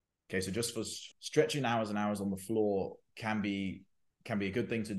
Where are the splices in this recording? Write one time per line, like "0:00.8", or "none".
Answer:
0:01.1